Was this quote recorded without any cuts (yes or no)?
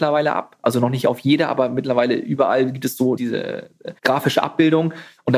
no